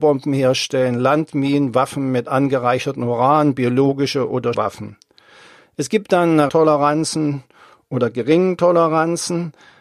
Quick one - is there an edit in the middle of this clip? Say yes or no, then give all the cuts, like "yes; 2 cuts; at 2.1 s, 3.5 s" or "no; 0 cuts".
yes; 2 cuts; at 4.5 s, 6.5 s